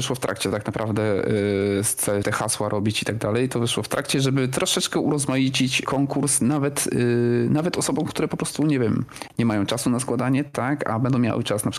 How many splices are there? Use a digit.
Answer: 1